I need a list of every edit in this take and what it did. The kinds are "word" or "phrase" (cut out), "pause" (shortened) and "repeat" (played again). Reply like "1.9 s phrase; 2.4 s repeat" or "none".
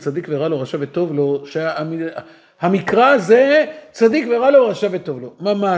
none